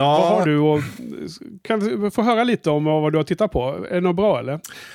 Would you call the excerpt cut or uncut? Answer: uncut